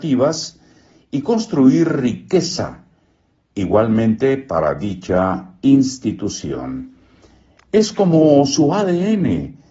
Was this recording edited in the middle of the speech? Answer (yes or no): no